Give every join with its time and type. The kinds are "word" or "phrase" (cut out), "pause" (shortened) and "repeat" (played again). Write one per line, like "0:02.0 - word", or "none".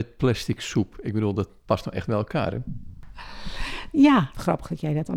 none